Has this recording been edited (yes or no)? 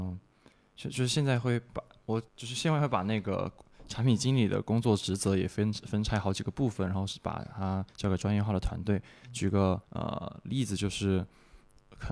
yes